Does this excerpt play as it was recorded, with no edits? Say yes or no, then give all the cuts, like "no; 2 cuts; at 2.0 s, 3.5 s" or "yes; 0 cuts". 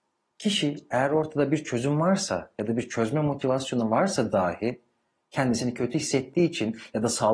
yes; 0 cuts